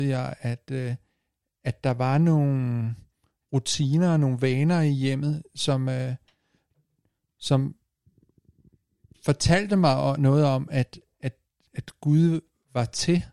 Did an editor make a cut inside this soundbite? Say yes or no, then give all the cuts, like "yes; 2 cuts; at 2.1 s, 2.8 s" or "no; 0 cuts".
no; 0 cuts